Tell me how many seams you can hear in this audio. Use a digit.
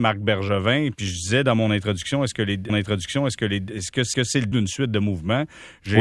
3